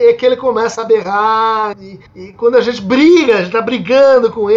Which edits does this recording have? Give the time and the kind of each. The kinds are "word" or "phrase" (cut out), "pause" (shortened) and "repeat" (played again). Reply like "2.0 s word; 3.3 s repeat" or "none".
1.7 s word; 2.1 s pause